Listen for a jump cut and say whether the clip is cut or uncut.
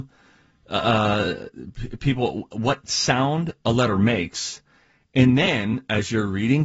uncut